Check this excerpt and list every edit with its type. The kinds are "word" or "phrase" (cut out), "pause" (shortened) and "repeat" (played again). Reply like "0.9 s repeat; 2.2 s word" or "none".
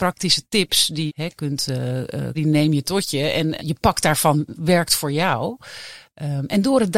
1.1 s word; 2.3 s phrase; 3.6 s word; 4.6 s word